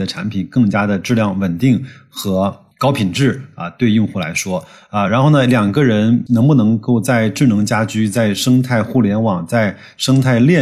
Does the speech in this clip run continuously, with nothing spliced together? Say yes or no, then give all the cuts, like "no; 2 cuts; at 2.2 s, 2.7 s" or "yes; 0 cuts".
yes; 0 cuts